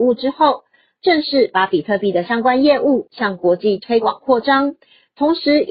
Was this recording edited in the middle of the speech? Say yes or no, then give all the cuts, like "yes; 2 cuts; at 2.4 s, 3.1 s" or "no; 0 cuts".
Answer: no; 0 cuts